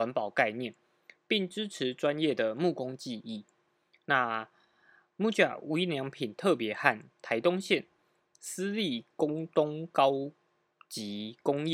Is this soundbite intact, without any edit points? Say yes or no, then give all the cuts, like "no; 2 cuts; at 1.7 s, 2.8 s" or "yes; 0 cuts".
yes; 0 cuts